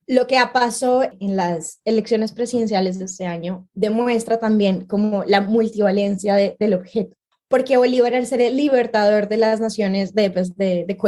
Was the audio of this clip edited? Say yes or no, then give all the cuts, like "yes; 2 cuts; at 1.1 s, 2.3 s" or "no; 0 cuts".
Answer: no; 0 cuts